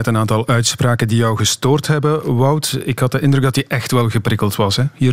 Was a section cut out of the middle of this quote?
no; 0 cuts

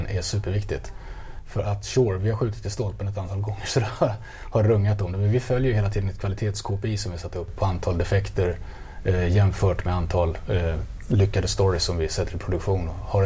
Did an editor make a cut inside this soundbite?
no; 0 cuts

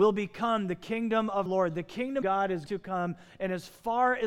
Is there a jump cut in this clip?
yes; 3 cuts; at 1.5 s, 2.2 s, 2.7 s

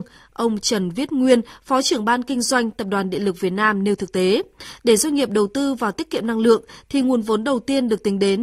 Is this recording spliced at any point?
no; 0 cuts

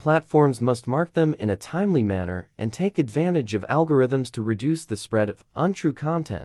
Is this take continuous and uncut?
yes; 0 cuts

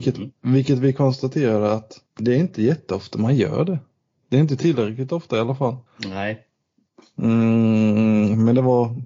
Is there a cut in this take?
yes; 1 cut; at 5.9 s

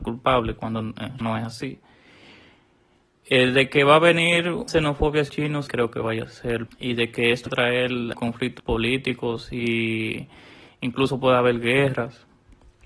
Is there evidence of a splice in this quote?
yes; 8 cuts; at 1.2 s, 4.7 s, 5.3 s, 5.7 s, 6.7 s, 7.5 s, 8.1 s, 8.6 s

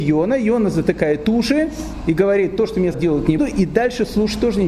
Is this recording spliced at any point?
yes; 2 cuts; at 2.9 s, 3.4 s

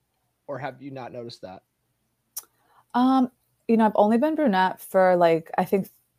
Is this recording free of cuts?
yes; 0 cuts

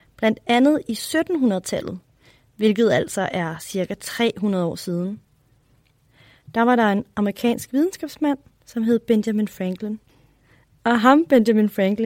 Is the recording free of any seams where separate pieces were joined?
yes; 0 cuts

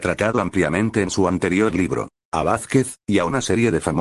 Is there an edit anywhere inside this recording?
no; 0 cuts

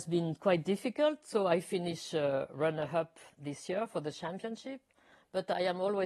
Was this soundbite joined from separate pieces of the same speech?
no; 0 cuts

